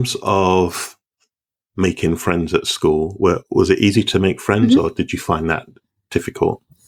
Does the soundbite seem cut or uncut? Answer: uncut